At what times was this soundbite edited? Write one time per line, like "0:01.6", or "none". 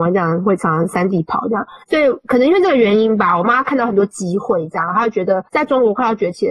0:01.8
0:05.5